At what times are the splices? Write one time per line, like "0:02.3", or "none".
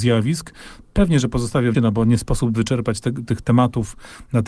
0:01.7